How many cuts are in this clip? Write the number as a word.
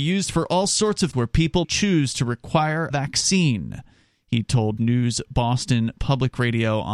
four